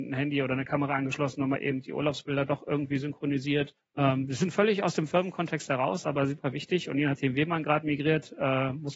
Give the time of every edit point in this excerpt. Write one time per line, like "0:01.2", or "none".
0:03.8